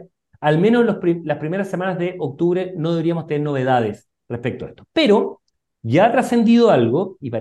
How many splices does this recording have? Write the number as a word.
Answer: zero